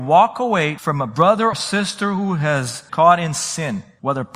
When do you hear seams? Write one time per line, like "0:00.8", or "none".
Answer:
0:01.5
0:02.9